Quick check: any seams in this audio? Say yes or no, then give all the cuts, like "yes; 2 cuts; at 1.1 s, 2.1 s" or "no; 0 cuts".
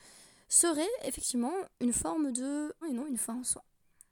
yes; 1 cut; at 2.8 s